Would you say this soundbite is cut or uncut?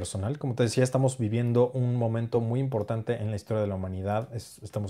uncut